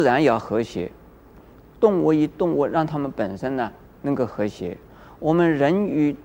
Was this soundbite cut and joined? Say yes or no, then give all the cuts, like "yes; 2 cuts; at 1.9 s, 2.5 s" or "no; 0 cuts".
no; 0 cuts